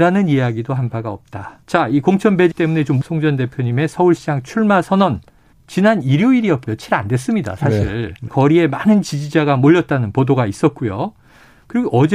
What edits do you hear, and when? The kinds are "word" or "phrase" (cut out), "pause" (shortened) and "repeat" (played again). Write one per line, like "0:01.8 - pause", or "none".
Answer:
0:01.6 - pause
0:02.5 - word
0:03.0 - phrase
0:05.5 - pause
0:06.6 - phrase
0:08.3 - phrase

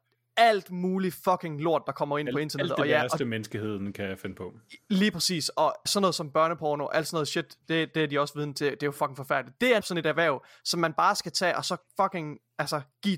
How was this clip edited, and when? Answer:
0:05.9 - word
0:09.8 - word

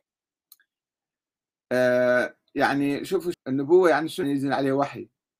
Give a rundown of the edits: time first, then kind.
0:03.3 - word
0:04.2 - word

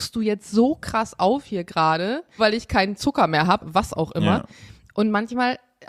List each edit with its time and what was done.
0:02.4 - word
0:03.6 - word

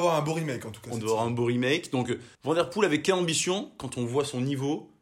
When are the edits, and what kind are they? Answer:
0:02.3 - pause

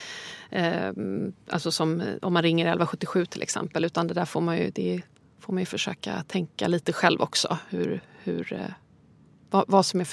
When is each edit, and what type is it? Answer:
none

